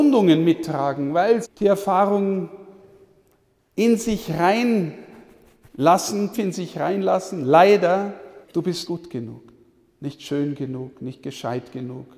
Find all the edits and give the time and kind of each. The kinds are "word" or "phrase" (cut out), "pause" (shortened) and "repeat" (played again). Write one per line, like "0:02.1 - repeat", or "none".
0:01.4 - word
0:06.3 - word
0:08.4 - pause
0:08.9 - word